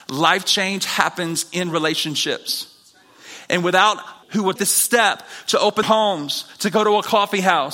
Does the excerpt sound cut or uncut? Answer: cut